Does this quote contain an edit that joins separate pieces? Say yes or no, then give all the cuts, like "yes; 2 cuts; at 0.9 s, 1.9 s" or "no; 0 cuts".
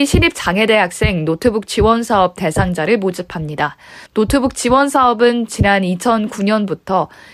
yes; 1 cut; at 4.1 s